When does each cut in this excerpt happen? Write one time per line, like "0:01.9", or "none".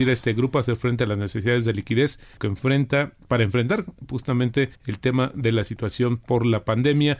0:02.4
0:04.7